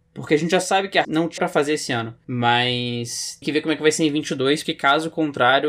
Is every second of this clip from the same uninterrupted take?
no; 4 cuts; at 1.0 s, 1.4 s, 3.4 s, 4.6 s

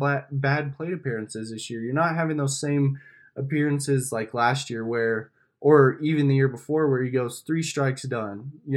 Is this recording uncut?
yes; 0 cuts

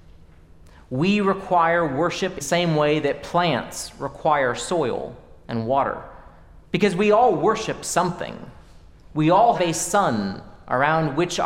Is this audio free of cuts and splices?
no; 3 cuts; at 2.4 s, 6.7 s, 9.6 s

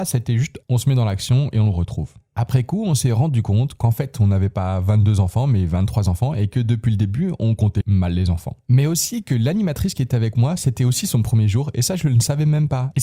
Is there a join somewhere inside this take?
yes; 1 cut; at 7.8 s

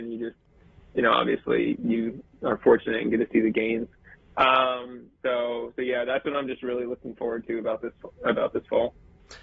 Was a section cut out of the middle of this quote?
no; 0 cuts

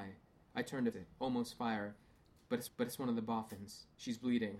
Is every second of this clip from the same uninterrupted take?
no; 2 cuts; at 0.9 s, 2.7 s

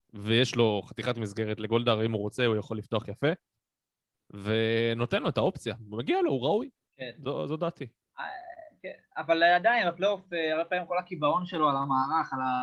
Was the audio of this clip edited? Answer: no; 0 cuts

